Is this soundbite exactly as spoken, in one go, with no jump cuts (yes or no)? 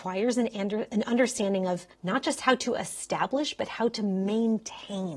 no